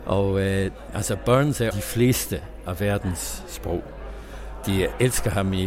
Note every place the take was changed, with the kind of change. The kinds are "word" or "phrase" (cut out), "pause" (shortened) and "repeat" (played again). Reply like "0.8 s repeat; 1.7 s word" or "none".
1.7 s phrase